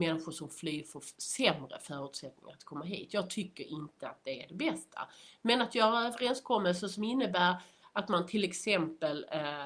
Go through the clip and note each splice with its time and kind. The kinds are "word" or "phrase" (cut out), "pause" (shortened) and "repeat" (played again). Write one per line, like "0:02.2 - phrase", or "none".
none